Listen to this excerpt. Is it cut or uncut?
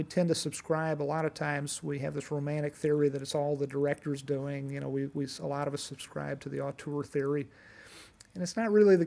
uncut